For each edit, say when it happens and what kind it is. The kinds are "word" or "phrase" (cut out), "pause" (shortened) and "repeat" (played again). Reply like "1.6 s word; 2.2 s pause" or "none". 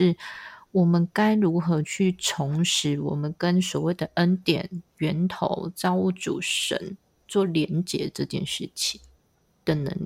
none